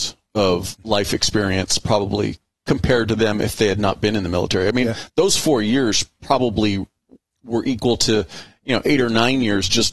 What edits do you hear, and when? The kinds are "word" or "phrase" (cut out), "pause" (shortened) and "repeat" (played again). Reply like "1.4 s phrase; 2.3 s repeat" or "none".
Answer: none